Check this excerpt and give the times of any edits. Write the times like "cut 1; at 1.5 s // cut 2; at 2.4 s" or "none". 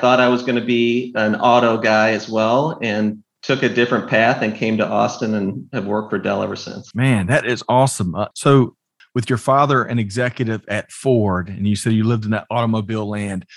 cut 1; at 6.9 s // cut 2; at 8.3 s